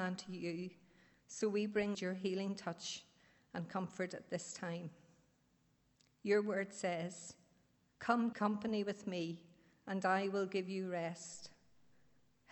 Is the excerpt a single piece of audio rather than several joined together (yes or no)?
no